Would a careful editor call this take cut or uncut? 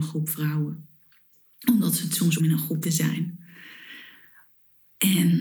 cut